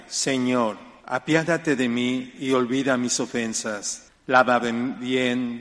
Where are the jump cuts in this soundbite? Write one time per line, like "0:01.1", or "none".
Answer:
0:01.0
0:04.1